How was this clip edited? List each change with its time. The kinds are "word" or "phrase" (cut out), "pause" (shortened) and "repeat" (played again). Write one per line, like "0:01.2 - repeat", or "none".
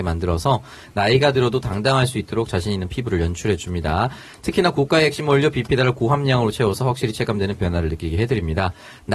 0:07.6 - word

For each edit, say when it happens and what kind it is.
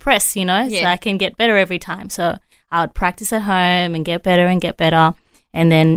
none

